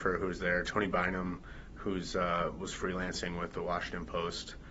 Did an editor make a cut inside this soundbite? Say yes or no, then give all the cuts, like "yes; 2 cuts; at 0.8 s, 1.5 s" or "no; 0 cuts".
no; 0 cuts